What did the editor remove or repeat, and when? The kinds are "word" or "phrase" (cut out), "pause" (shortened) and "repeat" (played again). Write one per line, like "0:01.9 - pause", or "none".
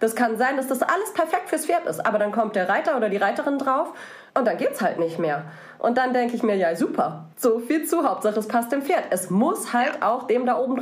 0:04.3 - pause
0:07.3 - pause